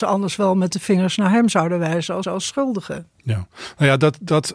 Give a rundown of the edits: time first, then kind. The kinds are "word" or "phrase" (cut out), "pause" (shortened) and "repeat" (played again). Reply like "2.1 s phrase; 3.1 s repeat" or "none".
2.2 s repeat